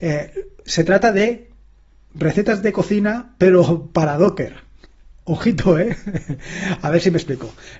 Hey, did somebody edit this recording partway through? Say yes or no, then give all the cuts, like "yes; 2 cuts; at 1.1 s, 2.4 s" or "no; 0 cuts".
no; 0 cuts